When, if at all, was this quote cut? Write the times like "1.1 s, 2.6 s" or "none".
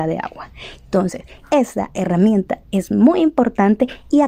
none